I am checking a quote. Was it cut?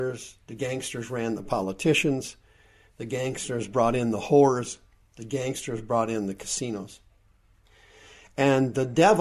no; 0 cuts

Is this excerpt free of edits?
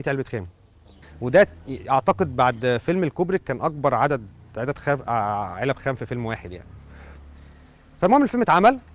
yes; 0 cuts

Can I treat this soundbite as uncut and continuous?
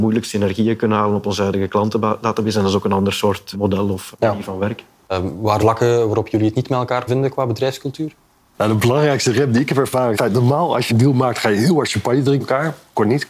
no; 7 cuts; at 3.5 s, 4.1 s, 5.6 s, 7.1 s, 10.1 s, 10.9 s, 12.4 s

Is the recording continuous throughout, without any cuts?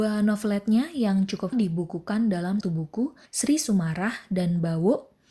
no; 3 cuts; at 1.5 s, 2.6 s, 3.3 s

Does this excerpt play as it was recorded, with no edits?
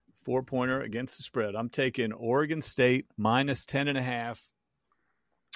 yes; 0 cuts

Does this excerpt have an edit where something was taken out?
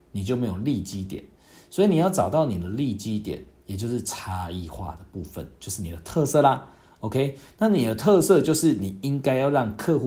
no; 0 cuts

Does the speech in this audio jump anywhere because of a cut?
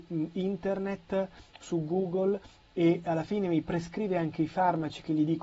no; 0 cuts

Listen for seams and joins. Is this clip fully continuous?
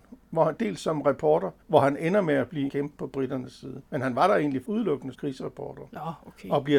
no; 5 cuts; at 1.6 s, 2.7 s, 3.9 s, 4.6 s, 5.1 s

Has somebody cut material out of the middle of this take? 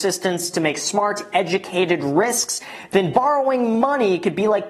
no; 0 cuts

